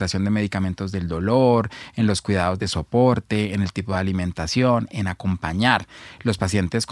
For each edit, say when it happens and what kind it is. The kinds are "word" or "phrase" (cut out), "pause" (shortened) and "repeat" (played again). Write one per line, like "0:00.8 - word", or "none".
none